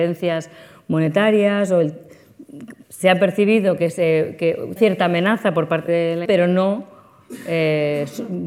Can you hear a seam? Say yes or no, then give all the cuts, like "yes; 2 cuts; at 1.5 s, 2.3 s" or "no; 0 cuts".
yes; 4 cuts; at 2.8 s, 4.8 s, 5.9 s, 6.2 s